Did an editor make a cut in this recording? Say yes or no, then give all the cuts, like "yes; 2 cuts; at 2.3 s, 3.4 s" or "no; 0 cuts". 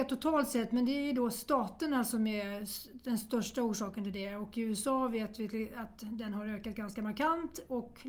no; 0 cuts